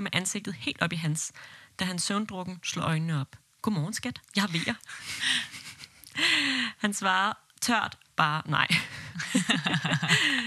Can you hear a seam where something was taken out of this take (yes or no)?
no